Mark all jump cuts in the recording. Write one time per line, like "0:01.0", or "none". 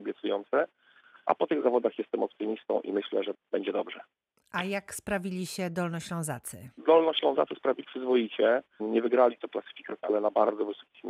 0:03.3
0:07.8
0:09.5
0:10.0